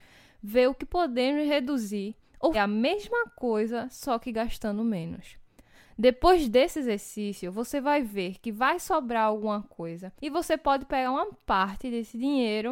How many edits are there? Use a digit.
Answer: 2